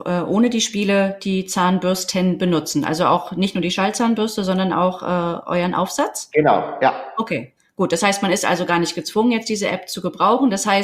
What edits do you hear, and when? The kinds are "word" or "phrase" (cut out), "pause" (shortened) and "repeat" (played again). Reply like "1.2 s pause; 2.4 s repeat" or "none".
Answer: none